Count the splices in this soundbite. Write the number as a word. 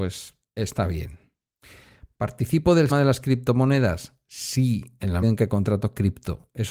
two